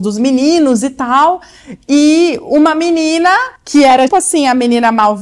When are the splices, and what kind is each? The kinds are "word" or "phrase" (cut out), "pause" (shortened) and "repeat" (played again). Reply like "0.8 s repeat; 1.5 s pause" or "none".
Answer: 3.6 s pause; 4.1 s word